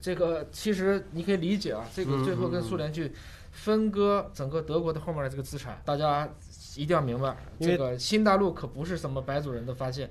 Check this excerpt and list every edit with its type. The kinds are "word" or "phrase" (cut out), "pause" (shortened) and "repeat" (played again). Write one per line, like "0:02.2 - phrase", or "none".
0:05.8 - word